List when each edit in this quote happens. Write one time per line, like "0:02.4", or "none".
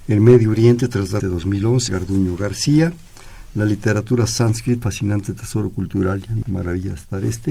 0:01.2
0:01.9
0:04.8
0:06.4